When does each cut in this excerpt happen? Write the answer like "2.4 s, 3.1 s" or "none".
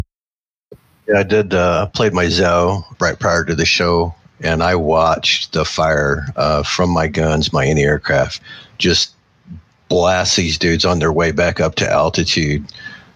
2.9 s